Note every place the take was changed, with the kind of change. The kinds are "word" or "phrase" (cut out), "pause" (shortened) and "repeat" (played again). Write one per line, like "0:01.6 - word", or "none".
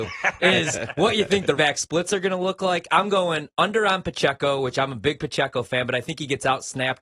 0:01.6 - word